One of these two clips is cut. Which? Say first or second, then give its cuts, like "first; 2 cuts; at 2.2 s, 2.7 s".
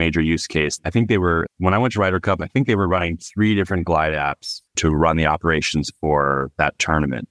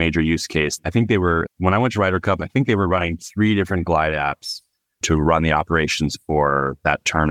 first; 1 cut; at 4.7 s